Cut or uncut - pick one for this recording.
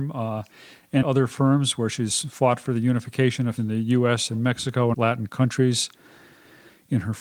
cut